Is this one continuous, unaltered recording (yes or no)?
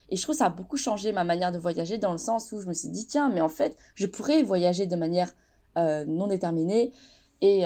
yes